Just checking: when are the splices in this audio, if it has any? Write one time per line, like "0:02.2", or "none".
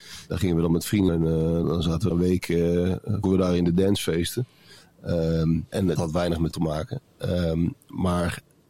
0:01.1
0:01.6
0:02.1
0:03.2
0:06.0
0:06.5